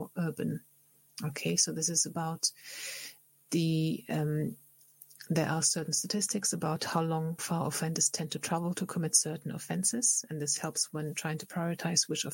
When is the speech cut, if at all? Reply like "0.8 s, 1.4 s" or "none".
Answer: 7.4 s